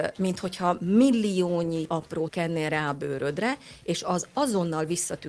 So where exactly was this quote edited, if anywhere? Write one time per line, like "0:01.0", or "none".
0:01.9
0:02.3